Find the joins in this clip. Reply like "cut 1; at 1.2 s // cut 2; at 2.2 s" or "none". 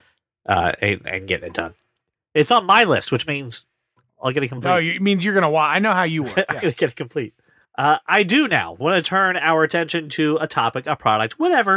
cut 1; at 7.6 s